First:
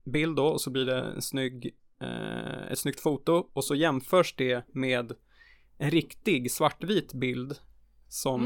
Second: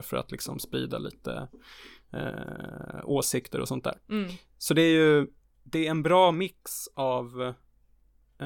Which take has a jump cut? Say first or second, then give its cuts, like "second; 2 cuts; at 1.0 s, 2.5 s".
second; 2 cuts; at 4.0 s, 5.4 s